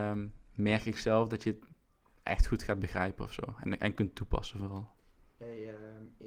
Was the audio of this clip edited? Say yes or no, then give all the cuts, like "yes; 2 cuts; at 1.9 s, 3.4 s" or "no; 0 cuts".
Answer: no; 0 cuts